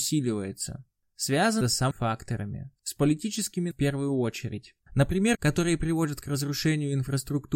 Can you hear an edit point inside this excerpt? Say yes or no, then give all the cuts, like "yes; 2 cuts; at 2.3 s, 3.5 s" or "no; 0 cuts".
yes; 4 cuts; at 1.6 s, 1.9 s, 3.7 s, 5.3 s